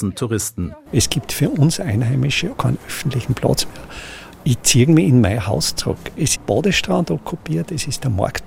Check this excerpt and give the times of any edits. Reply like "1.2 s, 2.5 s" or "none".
2.5 s, 6.4 s